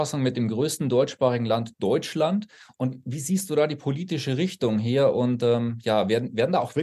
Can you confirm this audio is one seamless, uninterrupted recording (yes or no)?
yes